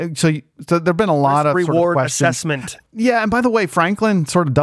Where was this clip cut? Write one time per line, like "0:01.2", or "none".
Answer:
0:02.9